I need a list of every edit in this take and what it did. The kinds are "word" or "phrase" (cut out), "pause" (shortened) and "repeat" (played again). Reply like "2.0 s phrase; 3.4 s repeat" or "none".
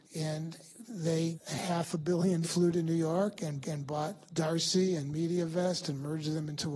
1.3 s word; 2.4 s phrase; 3.6 s repeat